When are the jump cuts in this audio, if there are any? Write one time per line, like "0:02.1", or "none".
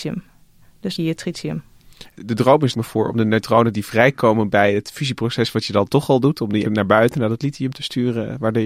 0:01.0
0:02.2
0:02.7
0:06.6